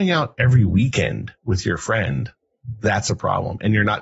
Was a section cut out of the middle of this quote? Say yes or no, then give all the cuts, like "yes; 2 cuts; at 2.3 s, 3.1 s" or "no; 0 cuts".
no; 0 cuts